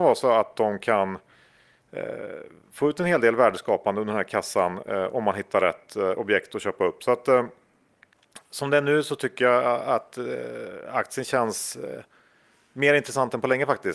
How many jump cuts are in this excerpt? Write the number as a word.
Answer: zero